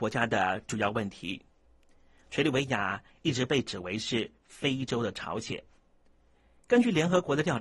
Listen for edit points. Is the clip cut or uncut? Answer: uncut